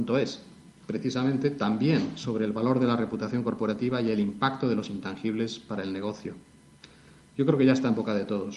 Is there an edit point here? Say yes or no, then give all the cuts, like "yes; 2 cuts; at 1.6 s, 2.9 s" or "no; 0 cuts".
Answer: no; 0 cuts